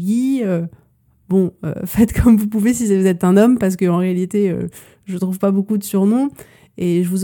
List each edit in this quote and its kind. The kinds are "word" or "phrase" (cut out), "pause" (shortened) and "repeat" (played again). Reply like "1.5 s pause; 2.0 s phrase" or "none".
none